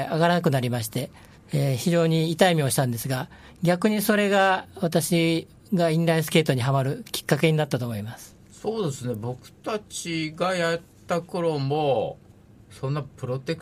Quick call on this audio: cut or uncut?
cut